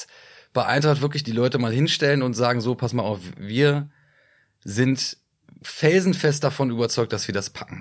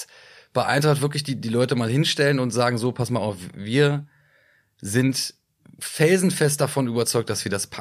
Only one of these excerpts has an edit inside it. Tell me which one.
first; 1 cut; at 1.2 s

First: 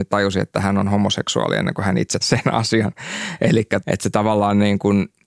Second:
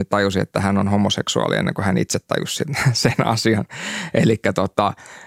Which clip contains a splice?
first; 2 cuts; at 2.2 s, 3.8 s

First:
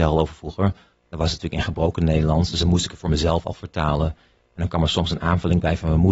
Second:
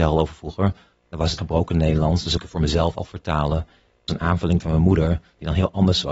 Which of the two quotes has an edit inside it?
second; 4 cuts; at 1.4 s, 2.4 s, 4.1 s, 4.6 s

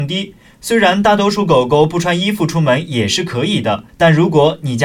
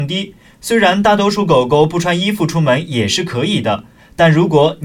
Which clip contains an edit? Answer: first; 1 cut; at 3.9 s

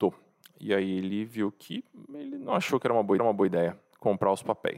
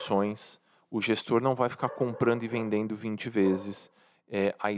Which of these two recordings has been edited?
first; 1 cut; at 3.2 s

